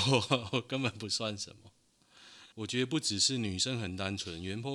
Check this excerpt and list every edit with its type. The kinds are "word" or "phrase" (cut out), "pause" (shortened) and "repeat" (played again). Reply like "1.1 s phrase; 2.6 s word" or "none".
2.5 s pause